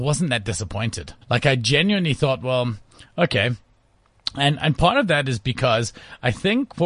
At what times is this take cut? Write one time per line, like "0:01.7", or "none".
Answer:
0:01.2